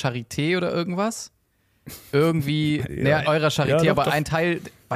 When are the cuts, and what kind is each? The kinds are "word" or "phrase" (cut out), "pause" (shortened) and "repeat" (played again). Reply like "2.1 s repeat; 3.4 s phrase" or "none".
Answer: 2.9 s phrase; 3.2 s word